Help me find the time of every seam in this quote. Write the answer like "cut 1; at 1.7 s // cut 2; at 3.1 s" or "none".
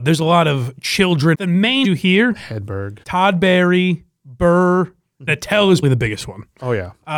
cut 1; at 1.3 s // cut 2; at 1.8 s // cut 3; at 3.0 s // cut 4; at 5.3 s // cut 5; at 5.8 s

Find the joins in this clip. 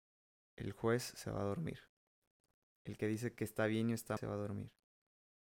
cut 1; at 4.2 s

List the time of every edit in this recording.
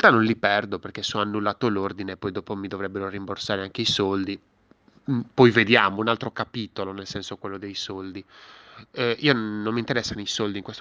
none

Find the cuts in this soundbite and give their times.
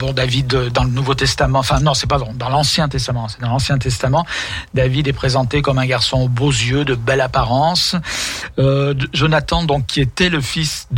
none

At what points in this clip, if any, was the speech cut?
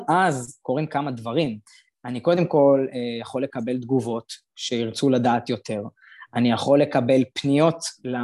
none

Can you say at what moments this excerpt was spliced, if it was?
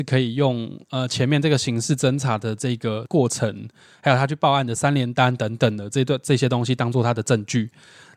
none

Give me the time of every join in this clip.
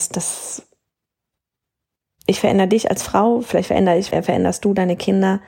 cut 1; at 4.1 s

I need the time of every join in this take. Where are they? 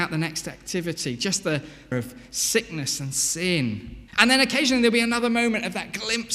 cut 1; at 1.9 s // cut 2; at 4.1 s

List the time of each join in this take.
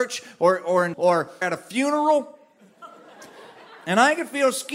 cut 1; at 0.9 s // cut 2; at 1.4 s

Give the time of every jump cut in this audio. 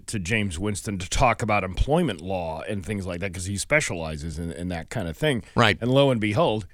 none

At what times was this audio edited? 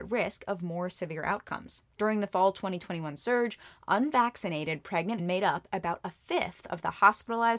cut 1; at 5.2 s

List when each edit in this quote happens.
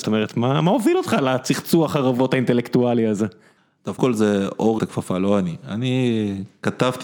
cut 1; at 4.0 s // cut 2; at 4.8 s

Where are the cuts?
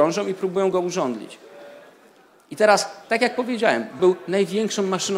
cut 1; at 4.0 s

